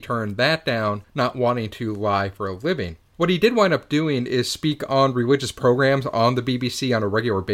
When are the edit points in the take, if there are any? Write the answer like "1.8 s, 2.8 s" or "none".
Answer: none